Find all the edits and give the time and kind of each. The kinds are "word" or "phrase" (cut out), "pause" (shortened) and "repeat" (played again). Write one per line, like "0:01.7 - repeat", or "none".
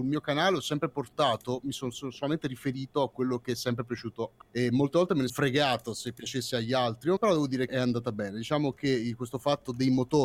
0:04.4 - word
0:05.3 - word
0:07.2 - word
0:07.7 - word